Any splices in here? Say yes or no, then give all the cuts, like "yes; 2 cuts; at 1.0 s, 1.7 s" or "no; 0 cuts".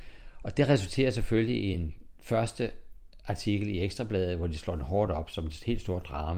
no; 0 cuts